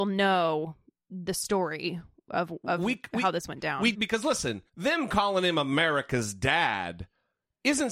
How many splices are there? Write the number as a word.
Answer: two